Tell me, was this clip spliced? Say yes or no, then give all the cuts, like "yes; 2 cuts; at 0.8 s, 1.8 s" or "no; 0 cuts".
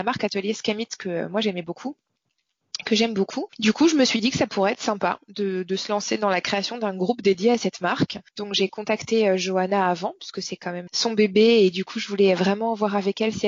yes; 1 cut; at 10.9 s